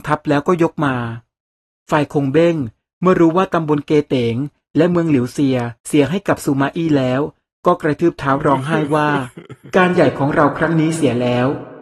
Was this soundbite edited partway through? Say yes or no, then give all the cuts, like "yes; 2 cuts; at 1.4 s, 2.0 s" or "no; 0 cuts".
yes; 1 cut; at 5.8 s